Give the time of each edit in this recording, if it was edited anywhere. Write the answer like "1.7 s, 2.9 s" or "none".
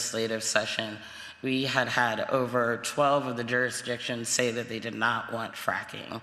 none